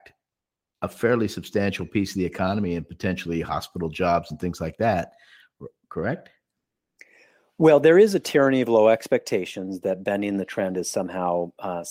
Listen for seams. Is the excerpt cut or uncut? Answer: uncut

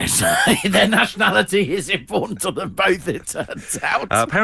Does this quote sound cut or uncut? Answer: uncut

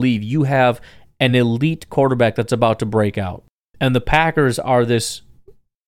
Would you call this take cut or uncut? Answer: uncut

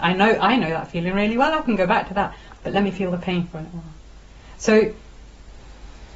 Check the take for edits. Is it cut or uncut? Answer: uncut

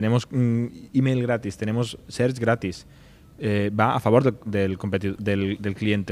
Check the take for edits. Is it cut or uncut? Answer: uncut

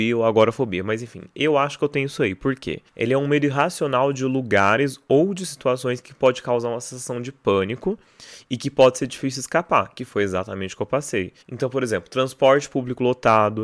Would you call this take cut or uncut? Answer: cut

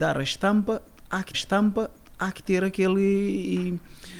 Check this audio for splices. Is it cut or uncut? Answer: cut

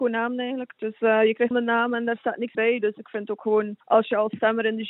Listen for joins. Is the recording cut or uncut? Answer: cut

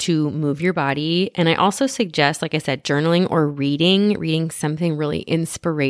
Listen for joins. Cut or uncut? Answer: uncut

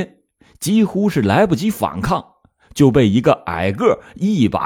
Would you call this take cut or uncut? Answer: uncut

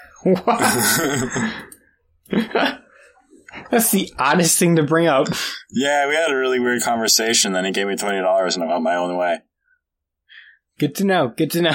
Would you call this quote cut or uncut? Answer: uncut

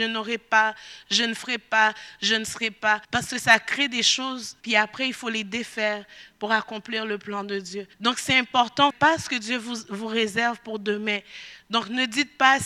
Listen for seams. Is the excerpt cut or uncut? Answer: cut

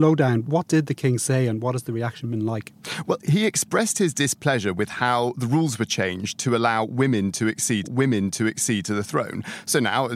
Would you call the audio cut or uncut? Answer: cut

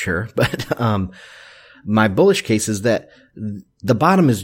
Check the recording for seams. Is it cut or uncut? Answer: uncut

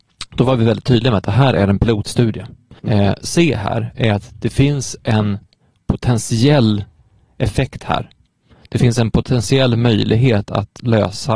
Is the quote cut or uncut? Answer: cut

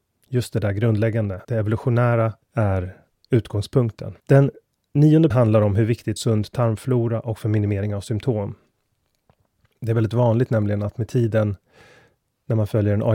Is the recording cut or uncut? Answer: cut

